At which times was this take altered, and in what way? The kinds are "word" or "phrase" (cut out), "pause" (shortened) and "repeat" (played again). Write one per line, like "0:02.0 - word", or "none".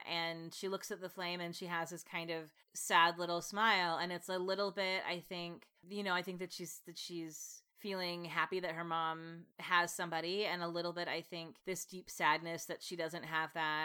0:02.6 - pause
0:05.8 - pause
0:07.7 - pause
0:09.5 - pause
0:11.6 - pause